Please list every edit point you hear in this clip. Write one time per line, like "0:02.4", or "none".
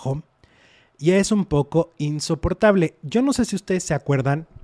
none